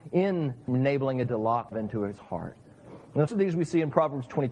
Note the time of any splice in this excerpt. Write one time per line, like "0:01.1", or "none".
0:01.3
0:01.7
0:02.2
0:03.3